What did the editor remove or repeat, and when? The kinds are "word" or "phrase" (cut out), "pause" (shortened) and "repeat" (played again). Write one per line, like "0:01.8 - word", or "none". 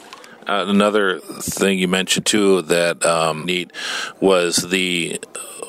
0:01.2 - word
0:03.4 - phrase